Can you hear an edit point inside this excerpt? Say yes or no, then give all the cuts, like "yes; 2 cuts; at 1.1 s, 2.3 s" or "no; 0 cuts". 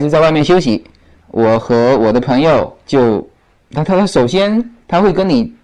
yes; 2 cuts; at 1.2 s, 2.8 s